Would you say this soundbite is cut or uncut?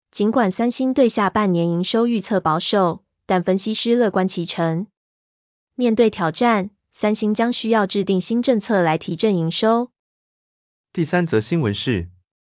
uncut